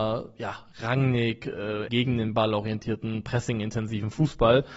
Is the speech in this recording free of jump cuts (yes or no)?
no